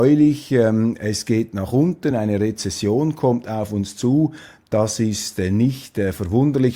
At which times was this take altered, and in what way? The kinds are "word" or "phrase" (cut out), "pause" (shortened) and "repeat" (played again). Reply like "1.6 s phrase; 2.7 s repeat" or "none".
none